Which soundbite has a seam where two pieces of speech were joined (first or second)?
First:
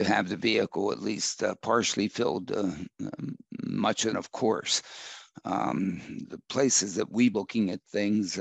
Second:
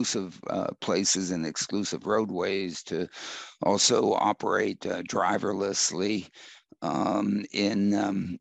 first